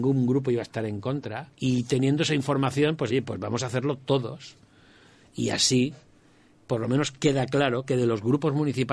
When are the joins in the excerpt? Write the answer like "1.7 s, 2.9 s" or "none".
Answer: 1.5 s, 3.1 s